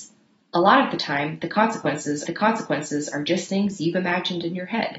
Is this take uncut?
no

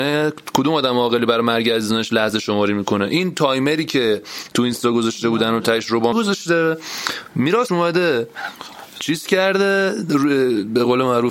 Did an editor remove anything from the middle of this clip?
yes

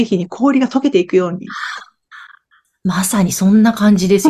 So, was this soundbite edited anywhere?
no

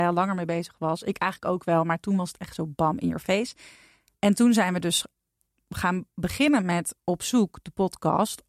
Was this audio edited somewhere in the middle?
no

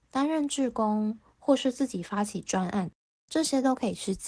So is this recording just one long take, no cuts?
yes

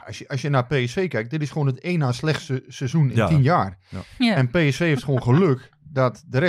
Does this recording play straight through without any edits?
yes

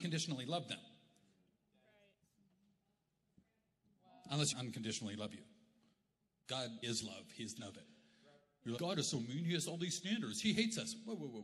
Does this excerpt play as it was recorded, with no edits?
no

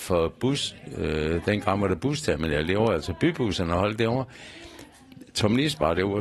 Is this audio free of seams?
yes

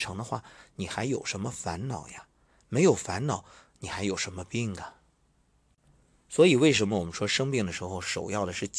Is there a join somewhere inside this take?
no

